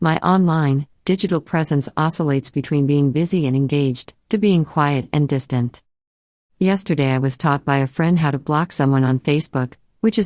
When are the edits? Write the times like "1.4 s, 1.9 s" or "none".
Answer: none